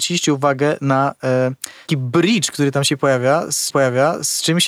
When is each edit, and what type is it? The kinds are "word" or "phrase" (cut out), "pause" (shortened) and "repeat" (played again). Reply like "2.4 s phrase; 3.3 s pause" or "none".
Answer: 1.9 s word; 3.7 s repeat